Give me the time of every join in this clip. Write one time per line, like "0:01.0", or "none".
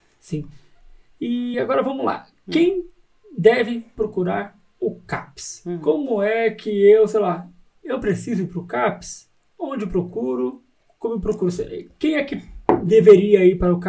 none